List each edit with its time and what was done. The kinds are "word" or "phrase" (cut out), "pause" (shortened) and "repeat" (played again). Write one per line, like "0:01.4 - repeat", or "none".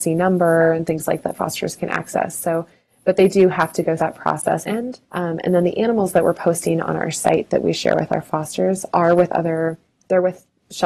0:01.2 - word
0:04.0 - word
0:04.6 - phrase
0:05.0 - pause